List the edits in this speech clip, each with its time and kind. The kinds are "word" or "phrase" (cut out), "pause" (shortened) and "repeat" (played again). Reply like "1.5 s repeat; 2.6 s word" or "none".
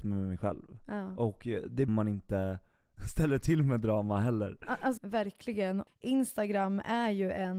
1.9 s phrase; 5.0 s word